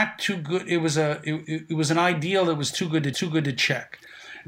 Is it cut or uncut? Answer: cut